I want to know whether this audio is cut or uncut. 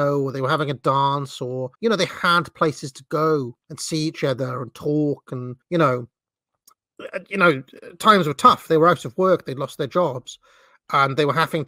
cut